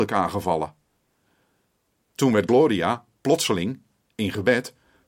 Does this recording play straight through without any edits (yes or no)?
yes